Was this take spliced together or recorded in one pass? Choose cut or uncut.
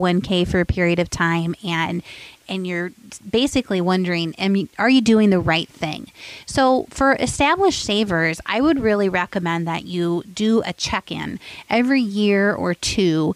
uncut